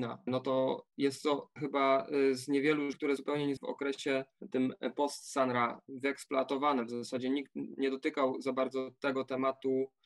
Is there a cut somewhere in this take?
yes; 3 cuts; at 1.6 s, 2.9 s, 3.6 s

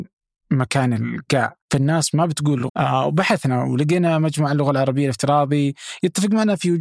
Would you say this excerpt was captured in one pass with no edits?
no; 2 cuts; at 1.6 s, 2.7 s

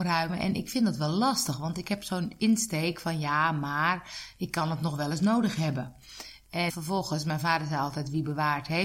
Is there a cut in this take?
yes; 1 cut; at 6.7 s

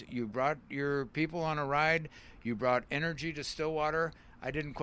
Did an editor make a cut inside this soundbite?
no; 0 cuts

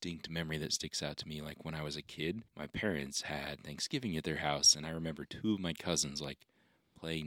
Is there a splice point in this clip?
yes; 1 cut; at 2.5 s

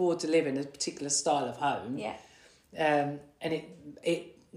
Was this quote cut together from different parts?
no; 0 cuts

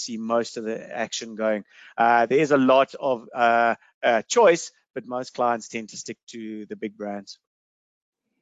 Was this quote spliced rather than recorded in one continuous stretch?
no; 0 cuts

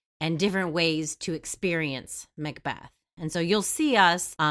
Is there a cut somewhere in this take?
no; 0 cuts

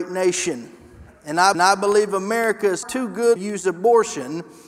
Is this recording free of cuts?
no; 3 cuts; at 1.5 s, 2.8 s, 3.4 s

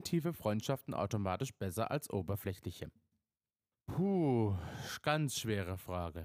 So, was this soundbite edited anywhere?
no; 0 cuts

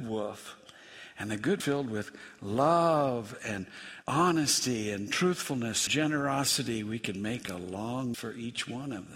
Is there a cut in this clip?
yes; 4 cuts; at 1.6 s, 4.0 s, 5.9 s, 8.1 s

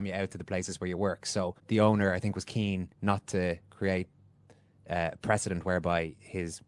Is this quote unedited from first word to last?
no; 2 cuts; at 1.6 s, 2.9 s

